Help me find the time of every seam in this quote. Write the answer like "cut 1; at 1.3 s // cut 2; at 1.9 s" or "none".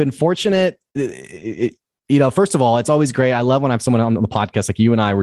none